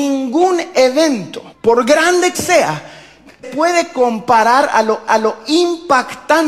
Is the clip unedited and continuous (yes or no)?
no